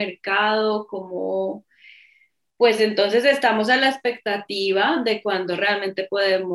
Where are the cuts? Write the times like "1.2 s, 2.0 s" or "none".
none